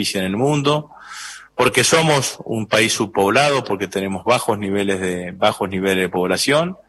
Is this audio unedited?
yes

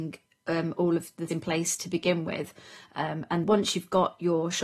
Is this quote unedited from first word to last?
no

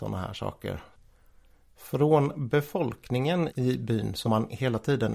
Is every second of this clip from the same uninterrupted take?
no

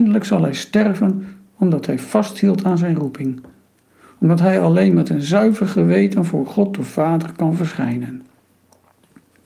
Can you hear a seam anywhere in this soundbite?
no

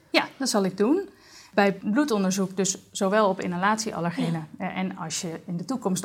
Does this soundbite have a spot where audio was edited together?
no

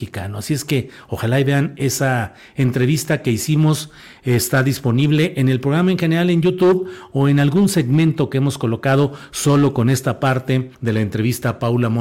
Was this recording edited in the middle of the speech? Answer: yes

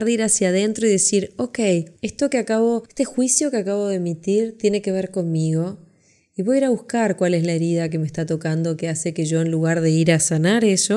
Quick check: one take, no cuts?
yes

